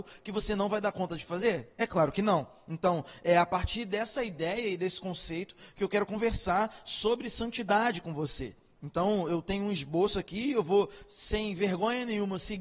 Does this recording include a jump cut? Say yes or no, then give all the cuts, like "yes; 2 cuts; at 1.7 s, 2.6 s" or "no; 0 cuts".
no; 0 cuts